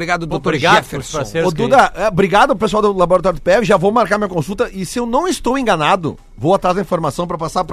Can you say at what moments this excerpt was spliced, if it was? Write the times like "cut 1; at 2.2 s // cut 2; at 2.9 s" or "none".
none